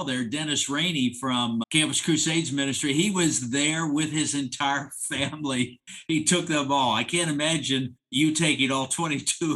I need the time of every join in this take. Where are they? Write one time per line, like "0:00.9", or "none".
0:01.6
0:08.0